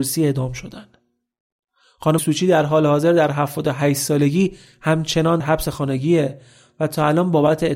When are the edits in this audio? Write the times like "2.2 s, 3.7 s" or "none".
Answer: 2.2 s, 5.4 s

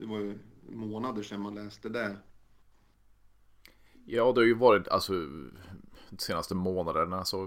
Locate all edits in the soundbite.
none

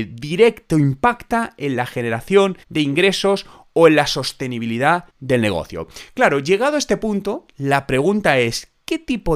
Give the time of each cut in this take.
2.6 s, 5.1 s

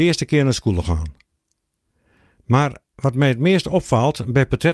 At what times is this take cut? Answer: none

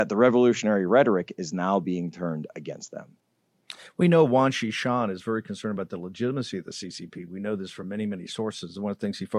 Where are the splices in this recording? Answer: none

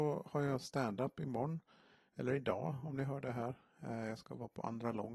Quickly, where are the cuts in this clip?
none

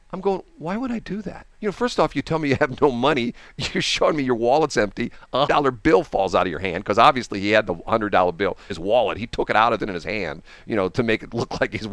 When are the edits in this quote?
1.5 s, 5.5 s, 8.7 s, 9.8 s

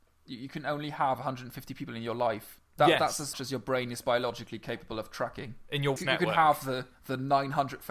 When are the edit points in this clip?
2.7 s, 3.3 s, 6.0 s, 6.9 s

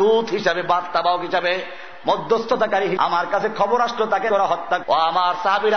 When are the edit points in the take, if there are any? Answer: 3.0 s, 4.3 s, 4.8 s

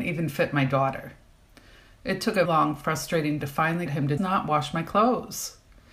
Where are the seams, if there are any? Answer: 2.4 s, 3.4 s, 3.9 s, 4.2 s

